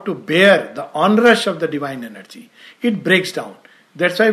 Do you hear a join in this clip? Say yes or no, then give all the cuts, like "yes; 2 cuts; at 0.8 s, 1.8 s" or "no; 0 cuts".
no; 0 cuts